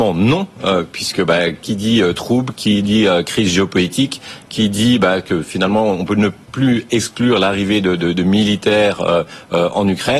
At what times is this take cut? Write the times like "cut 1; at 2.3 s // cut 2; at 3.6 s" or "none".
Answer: cut 1; at 6.4 s